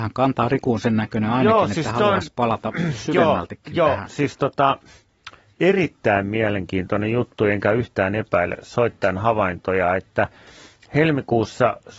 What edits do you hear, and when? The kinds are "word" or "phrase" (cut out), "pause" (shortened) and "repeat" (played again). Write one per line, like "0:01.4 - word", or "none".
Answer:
none